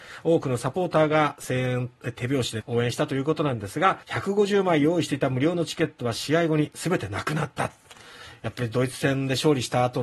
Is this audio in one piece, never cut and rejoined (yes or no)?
no